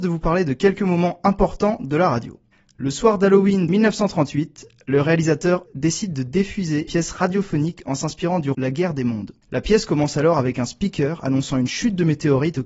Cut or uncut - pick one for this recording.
cut